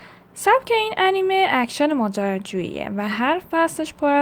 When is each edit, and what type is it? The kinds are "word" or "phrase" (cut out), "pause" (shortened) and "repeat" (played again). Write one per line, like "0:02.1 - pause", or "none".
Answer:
none